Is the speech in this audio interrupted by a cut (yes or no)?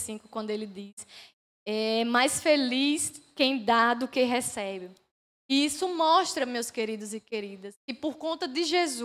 no